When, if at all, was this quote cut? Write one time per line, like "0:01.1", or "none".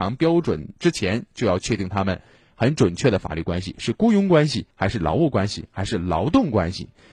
0:04.7

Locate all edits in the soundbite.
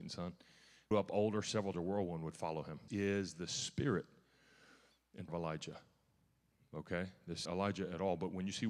0:00.9
0:01.7
0:02.9
0:05.3
0:07.5

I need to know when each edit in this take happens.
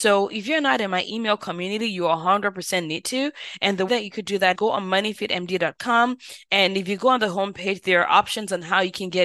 0:03.9
0:04.5

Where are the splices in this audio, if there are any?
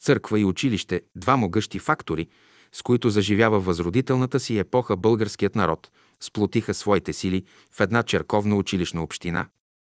none

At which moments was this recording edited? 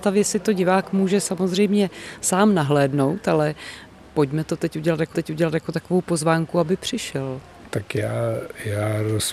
0:05.1

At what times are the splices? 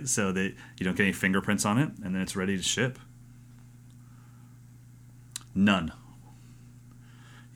none

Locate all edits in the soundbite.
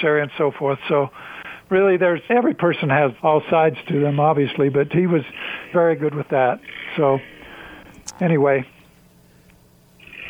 0:02.3
0:03.2
0:05.7

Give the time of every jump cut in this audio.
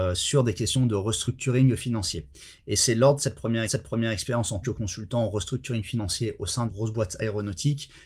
0:03.7
0:04.6
0:06.7

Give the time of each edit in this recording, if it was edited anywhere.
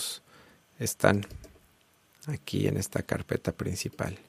none

